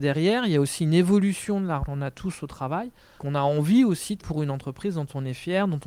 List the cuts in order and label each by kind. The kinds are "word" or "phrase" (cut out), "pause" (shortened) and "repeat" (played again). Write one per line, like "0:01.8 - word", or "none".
0:01.8 - word
0:03.2 - word
0:04.2 - word

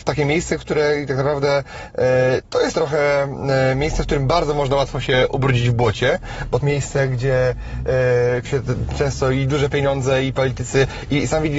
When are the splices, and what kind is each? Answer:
0:02.7 - word
0:06.6 - word
0:08.5 - word

